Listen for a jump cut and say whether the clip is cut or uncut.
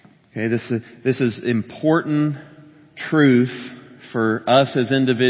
uncut